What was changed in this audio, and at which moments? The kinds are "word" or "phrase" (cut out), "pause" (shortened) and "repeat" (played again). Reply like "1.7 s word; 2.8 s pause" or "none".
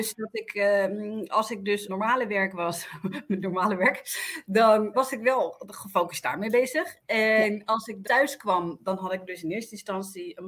1.9 s phrase; 4.9 s word; 8.0 s word